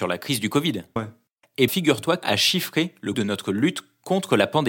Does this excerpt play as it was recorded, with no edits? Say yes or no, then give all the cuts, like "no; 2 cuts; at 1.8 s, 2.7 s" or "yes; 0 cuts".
no; 4 cuts; at 1.0 s, 1.7 s, 2.2 s, 3.1 s